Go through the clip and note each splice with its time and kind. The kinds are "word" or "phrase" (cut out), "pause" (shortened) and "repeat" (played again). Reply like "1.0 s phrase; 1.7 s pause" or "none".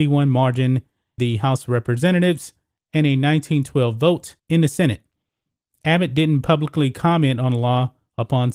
1.2 s word; 4.4 s pause